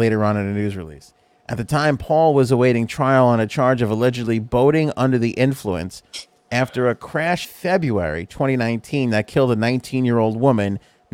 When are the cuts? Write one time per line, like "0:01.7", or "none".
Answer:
0:07.4